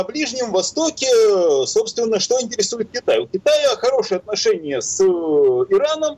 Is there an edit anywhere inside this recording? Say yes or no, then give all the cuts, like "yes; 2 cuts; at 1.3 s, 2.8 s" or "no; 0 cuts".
no; 0 cuts